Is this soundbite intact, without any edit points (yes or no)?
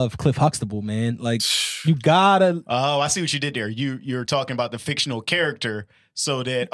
yes